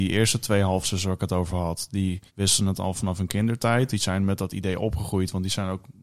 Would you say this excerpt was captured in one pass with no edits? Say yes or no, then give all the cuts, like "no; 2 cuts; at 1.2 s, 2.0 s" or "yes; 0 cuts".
no; 1 cut; at 2.3 s